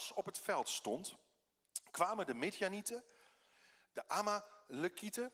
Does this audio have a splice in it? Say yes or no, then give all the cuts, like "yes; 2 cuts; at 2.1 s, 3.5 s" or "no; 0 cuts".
no; 0 cuts